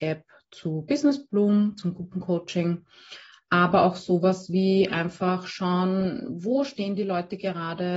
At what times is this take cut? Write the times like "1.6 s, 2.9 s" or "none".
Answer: none

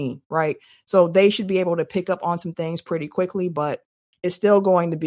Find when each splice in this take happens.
none

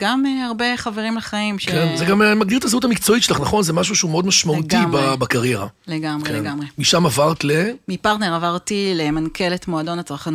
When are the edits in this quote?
none

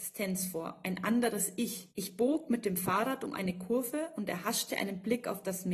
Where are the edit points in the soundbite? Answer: 1.9 s

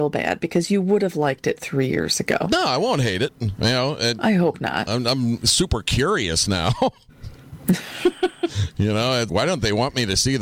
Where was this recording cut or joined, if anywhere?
9.3 s

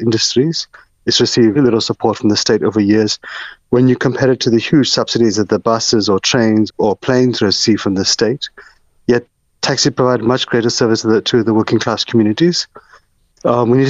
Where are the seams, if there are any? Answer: 1.5 s, 6.7 s

